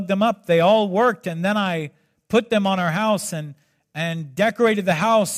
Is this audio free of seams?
yes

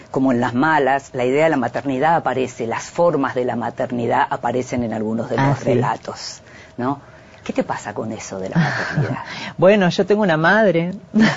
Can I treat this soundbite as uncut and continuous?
yes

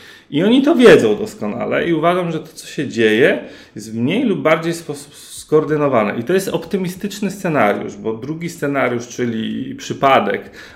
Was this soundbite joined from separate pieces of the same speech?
no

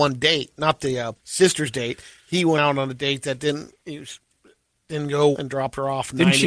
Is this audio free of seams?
no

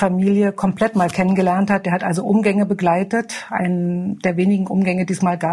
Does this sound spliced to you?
no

